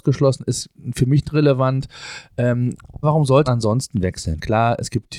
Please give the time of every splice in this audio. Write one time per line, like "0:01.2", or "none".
0:01.2
0:03.0
0:03.5